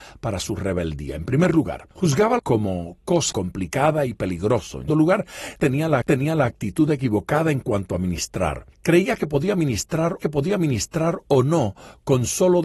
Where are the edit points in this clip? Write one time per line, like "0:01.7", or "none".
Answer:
0:01.9
0:02.4
0:03.3
0:04.9
0:06.0
0:08.7
0:10.2